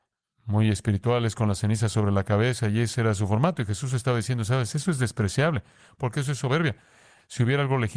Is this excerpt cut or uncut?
uncut